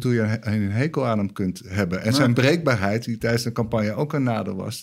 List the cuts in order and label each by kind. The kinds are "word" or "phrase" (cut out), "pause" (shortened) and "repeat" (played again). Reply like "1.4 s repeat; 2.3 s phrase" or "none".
none